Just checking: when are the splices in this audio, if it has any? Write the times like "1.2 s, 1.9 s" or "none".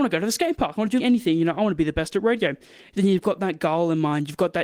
1.0 s